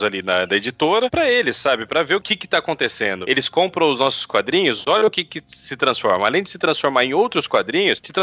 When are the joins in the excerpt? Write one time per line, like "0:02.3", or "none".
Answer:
none